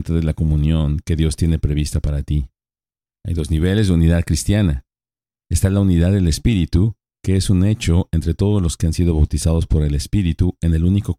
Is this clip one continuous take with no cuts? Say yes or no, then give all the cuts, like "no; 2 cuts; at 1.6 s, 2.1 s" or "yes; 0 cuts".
yes; 0 cuts